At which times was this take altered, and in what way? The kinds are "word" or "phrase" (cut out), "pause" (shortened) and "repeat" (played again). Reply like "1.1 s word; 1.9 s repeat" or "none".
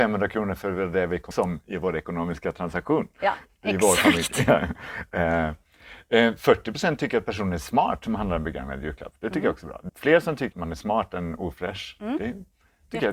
1.3 s word; 9.9 s word; 10.5 s word